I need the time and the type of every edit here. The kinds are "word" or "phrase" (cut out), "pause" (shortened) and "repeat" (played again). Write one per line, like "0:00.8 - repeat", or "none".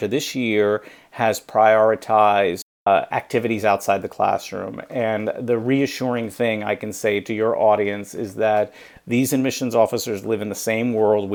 none